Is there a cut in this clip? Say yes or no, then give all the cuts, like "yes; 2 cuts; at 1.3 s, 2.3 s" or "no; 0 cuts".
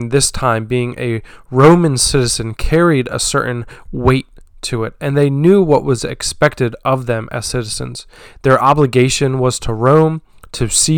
no; 0 cuts